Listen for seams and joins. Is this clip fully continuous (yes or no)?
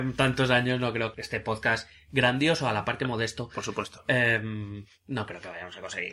no